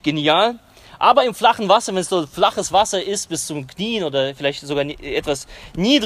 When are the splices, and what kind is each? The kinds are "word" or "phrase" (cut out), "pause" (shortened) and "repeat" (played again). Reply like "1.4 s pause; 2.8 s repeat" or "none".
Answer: none